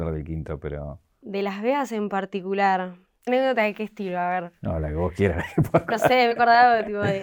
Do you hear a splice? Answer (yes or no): yes